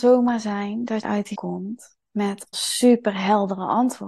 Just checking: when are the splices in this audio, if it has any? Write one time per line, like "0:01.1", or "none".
0:01.0
0:01.3
0:02.5